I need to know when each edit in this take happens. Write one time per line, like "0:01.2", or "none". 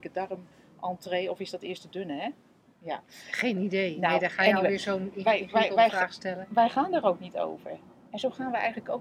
none